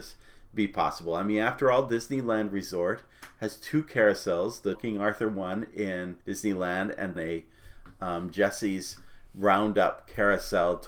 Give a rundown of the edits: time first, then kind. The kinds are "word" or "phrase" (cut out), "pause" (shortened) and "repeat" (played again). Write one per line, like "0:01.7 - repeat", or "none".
0:04.7 - word
0:06.2 - pause
0:07.2 - word